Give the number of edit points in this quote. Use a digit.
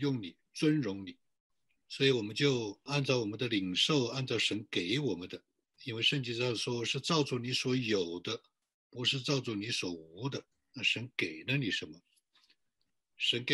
1